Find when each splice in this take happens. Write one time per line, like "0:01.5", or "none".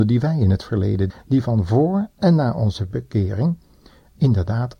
0:01.1